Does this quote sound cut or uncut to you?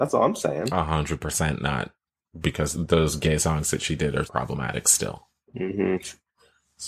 cut